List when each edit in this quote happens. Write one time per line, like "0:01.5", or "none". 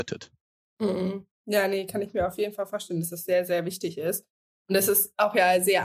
none